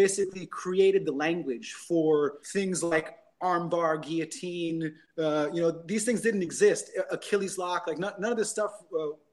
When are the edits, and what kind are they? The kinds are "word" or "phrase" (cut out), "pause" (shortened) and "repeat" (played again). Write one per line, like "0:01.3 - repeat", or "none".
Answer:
0:02.4 - pause